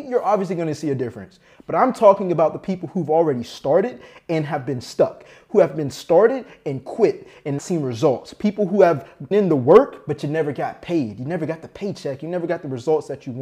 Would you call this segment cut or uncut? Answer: cut